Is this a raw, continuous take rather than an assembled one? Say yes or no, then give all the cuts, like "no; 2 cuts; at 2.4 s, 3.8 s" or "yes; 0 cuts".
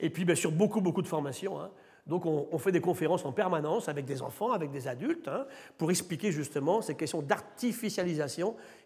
yes; 0 cuts